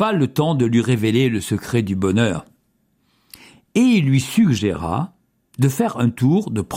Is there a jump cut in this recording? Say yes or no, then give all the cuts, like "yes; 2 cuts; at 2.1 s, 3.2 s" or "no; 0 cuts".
no; 0 cuts